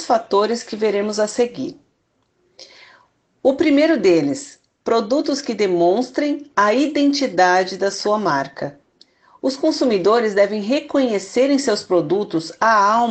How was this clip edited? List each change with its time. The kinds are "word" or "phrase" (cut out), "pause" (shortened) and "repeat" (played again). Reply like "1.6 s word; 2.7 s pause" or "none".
none